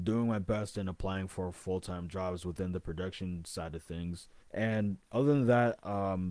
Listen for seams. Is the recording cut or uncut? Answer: cut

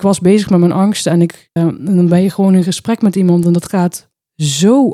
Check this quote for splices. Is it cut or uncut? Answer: cut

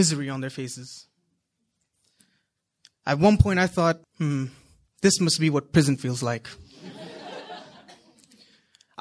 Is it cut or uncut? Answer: cut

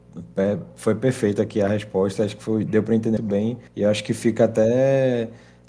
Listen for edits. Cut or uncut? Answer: cut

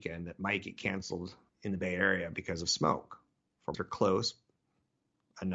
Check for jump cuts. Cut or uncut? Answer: cut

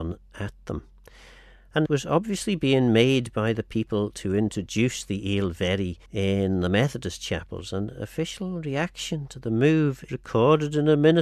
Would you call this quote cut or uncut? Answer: cut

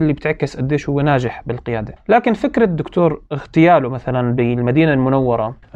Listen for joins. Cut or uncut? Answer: uncut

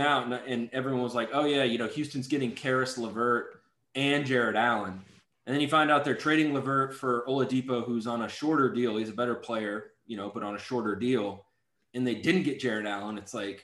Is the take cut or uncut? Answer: uncut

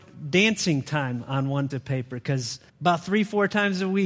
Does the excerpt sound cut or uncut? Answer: cut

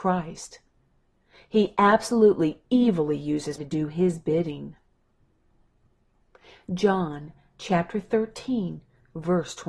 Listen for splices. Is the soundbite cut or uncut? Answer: cut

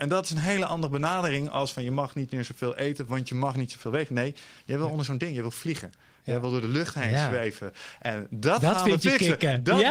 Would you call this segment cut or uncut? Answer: uncut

